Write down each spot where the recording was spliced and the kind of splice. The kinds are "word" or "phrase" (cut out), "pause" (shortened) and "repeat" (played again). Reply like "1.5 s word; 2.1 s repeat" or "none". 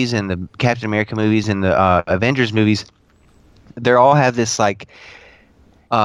none